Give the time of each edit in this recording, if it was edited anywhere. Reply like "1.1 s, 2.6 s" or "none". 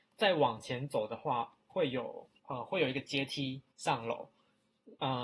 2.4 s, 3.7 s